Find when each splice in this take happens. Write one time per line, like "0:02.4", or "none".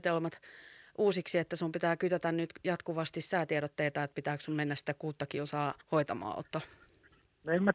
0:05.8